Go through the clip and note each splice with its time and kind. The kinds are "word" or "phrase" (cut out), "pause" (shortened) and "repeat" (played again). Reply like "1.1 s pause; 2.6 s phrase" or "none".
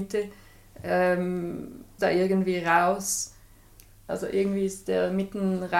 2.0 s word